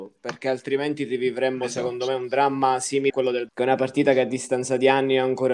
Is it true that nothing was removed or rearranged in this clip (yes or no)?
no